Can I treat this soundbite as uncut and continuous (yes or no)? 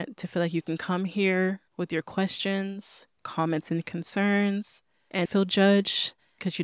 no